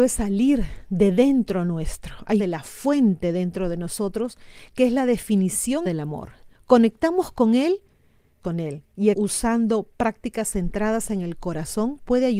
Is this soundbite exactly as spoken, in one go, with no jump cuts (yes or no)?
no